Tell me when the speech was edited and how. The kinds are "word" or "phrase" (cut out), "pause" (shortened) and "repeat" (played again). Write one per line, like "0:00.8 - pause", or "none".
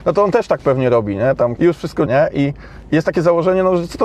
0:01.6 - phrase
0:02.1 - word